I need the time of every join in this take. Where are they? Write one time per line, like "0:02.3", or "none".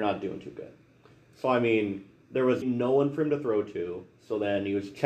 0:02.6